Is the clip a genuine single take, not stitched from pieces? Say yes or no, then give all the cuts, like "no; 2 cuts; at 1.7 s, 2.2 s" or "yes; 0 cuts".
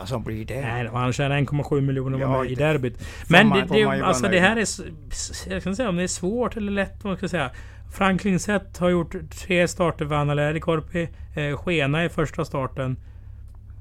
no; 2 cuts; at 2.5 s, 3.7 s